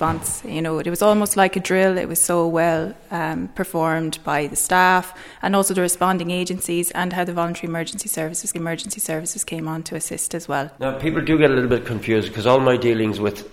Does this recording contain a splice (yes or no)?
yes